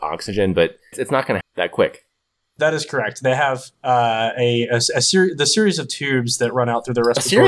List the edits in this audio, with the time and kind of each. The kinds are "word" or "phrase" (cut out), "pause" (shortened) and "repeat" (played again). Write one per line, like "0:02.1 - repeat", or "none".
0:00.9 - word
0:01.4 - word
0:02.6 - word
0:03.7 - pause